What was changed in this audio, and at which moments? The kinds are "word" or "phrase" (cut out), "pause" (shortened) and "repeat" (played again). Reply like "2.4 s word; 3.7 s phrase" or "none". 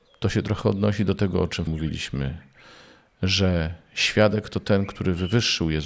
1.7 s word